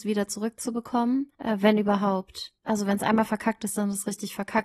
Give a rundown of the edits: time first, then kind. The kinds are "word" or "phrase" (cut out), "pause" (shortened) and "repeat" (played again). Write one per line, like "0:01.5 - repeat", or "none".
0:01.3 - pause
0:02.6 - pause